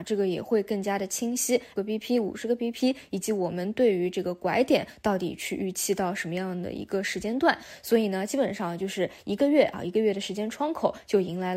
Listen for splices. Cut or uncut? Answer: cut